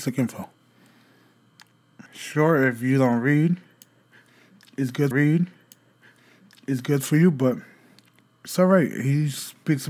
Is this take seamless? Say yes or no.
no